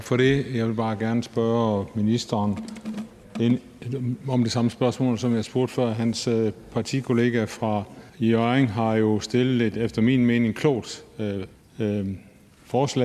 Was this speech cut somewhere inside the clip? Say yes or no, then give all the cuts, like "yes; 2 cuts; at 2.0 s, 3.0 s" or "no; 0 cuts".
yes; 2 cuts; at 8.1 s, 11.5 s